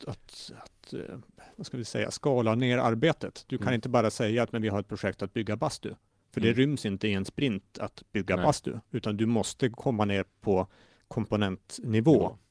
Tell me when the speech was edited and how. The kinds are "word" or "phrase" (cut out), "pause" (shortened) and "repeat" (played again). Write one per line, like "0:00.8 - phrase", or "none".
none